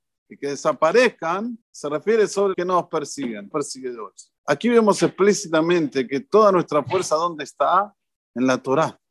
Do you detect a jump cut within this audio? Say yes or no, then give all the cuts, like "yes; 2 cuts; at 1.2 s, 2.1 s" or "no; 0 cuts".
yes; 4 cuts; at 1.6 s, 2.5 s, 3.5 s, 4.4 s